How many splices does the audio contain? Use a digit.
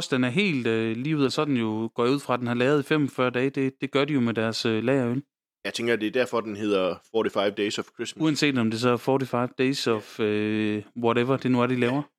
1